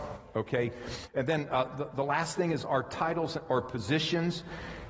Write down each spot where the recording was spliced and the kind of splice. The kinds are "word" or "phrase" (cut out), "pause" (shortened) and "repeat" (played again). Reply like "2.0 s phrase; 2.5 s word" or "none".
none